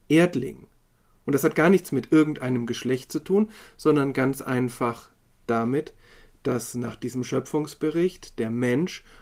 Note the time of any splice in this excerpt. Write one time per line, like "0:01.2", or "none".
none